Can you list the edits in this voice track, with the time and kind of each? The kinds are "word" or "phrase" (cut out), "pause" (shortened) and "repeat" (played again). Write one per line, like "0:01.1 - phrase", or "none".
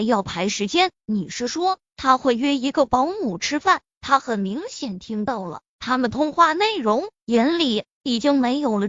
none